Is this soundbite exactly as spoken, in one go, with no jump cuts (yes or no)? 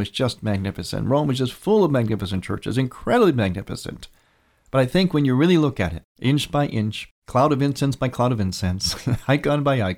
yes